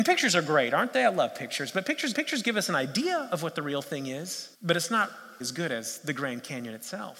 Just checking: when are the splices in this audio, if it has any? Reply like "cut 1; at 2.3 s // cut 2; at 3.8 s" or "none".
cut 1; at 2.1 s // cut 2; at 4.5 s // cut 3; at 5.4 s

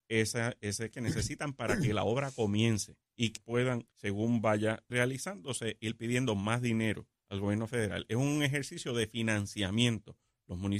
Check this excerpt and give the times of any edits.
cut 1; at 0.9 s // cut 2; at 3.0 s // cut 3; at 3.4 s // cut 4; at 3.9 s // cut 5; at 4.9 s

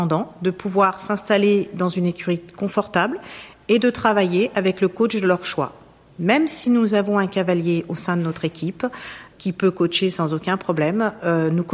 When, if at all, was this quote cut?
none

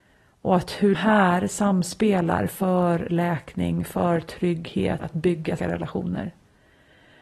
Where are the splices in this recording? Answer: cut 1; at 0.9 s // cut 2; at 5.0 s // cut 3; at 5.6 s

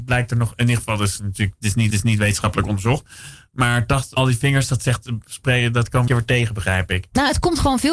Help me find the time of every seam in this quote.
cut 1; at 1.9 s // cut 2; at 4.2 s // cut 3; at 6.1 s

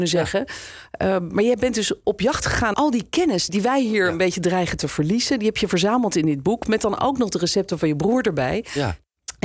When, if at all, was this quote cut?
cut 1; at 2.0 s // cut 2; at 2.7 s // cut 3; at 3.5 s

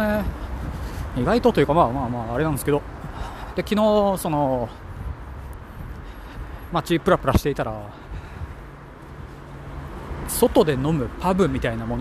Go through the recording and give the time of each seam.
cut 1; at 6.7 s

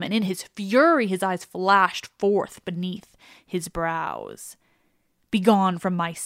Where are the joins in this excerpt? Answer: none

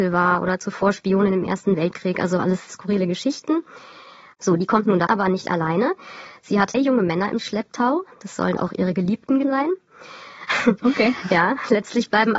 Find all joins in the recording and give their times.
cut 1; at 2.7 s // cut 2; at 5.1 s // cut 3; at 6.7 s // cut 4; at 8.6 s // cut 5; at 9.4 s

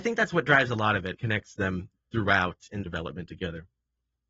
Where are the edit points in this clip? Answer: cut 1; at 1.1 s // cut 2; at 2.8 s

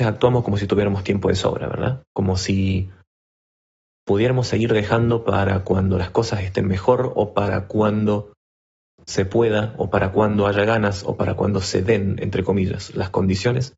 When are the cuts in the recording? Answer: none

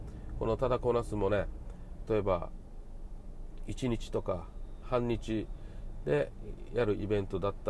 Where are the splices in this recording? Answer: cut 1; at 2.1 s // cut 2; at 4.8 s

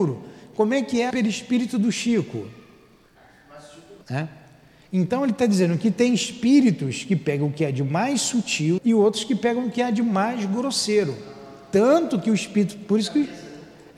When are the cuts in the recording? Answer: cut 1; at 1.1 s // cut 2; at 4.0 s // cut 3; at 8.8 s

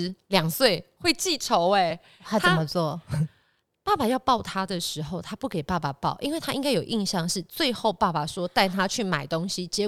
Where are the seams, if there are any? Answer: none

